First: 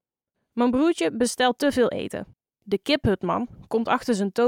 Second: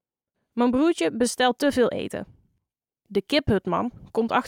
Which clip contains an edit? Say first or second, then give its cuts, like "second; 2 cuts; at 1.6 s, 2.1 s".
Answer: first; 1 cut; at 2.3 s